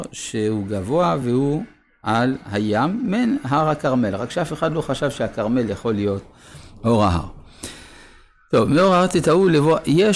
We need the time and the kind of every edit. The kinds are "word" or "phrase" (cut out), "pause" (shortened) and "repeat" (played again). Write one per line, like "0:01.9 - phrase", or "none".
none